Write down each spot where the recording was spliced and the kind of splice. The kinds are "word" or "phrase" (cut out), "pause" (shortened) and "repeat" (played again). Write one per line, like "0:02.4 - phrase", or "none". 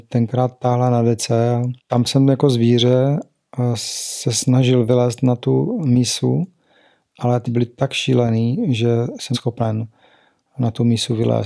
0:01.8 - pause
0:07.5 - word
0:09.3 - word